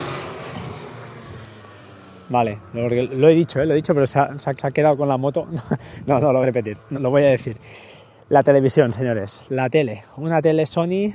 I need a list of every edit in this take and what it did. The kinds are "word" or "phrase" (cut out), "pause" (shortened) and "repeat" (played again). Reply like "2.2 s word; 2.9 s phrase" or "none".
4.6 s repeat; 6.4 s word; 6.9 s word